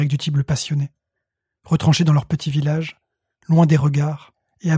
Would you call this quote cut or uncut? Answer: uncut